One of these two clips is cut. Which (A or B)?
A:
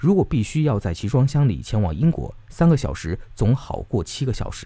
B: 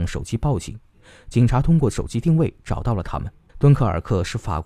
B